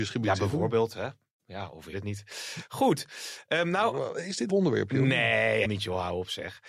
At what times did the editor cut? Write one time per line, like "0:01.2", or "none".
0:01.9
0:04.5
0:05.6